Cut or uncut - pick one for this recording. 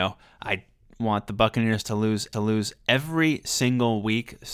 cut